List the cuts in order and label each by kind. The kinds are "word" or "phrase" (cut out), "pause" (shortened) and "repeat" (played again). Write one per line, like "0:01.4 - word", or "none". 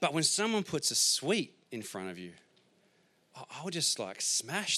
none